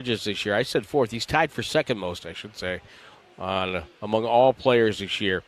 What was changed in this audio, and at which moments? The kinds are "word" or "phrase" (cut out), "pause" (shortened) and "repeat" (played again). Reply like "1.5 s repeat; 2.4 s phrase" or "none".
none